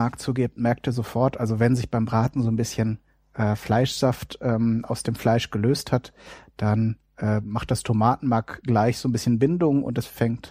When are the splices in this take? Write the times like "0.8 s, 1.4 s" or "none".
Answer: none